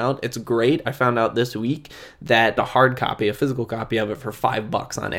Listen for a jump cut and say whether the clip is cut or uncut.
cut